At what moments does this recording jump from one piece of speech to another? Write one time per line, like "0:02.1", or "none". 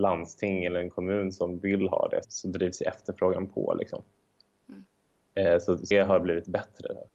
0:02.2
0:05.9